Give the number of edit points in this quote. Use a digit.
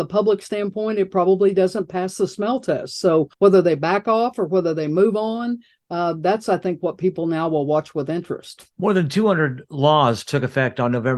2